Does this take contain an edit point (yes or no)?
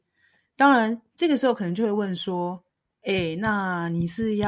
yes